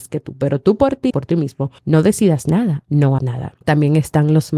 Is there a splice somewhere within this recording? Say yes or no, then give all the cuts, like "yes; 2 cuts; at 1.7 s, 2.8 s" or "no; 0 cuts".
yes; 4 cuts; at 1.1 s, 1.8 s, 3.2 s, 3.6 s